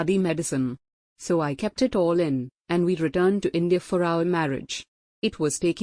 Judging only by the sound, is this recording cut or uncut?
uncut